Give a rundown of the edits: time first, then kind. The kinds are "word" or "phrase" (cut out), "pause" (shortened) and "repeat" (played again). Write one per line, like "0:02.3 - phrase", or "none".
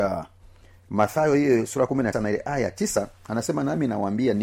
0:02.1 - word